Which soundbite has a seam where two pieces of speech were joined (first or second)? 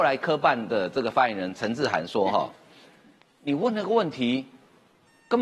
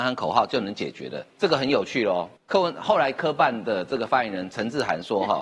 second